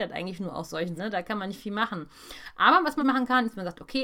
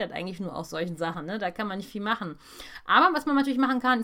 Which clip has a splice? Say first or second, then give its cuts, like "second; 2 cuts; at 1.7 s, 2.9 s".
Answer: first; 2 cuts; at 1.0 s, 3.0 s